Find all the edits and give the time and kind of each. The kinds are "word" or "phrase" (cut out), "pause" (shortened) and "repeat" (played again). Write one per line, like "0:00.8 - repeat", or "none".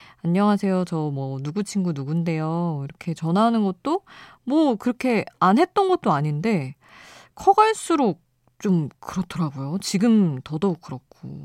none